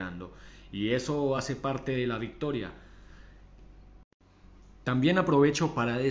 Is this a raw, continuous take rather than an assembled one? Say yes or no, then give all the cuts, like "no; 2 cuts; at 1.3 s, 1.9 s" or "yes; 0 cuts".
yes; 0 cuts